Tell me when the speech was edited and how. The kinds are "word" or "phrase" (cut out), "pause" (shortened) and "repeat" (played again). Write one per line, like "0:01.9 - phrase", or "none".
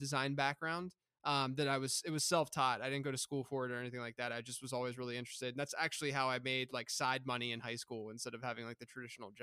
none